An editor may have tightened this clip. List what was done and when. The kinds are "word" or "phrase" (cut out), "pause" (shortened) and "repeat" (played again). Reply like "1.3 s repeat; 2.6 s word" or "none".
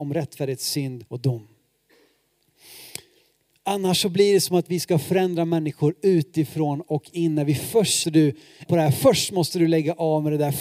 1.1 s pause; 8.0 s phrase; 8.7 s word